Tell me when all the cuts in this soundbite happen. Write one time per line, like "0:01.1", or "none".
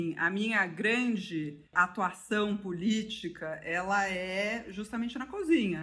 0:01.7